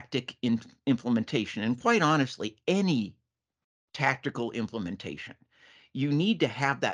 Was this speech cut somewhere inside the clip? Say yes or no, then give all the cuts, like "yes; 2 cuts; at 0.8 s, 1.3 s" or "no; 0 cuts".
no; 0 cuts